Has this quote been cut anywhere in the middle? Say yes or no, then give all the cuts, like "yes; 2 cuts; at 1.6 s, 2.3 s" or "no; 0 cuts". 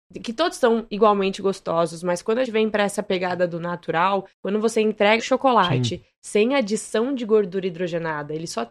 yes; 3 cuts; at 2.5 s, 4.3 s, 5.2 s